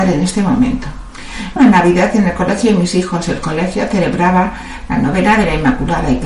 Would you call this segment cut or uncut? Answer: cut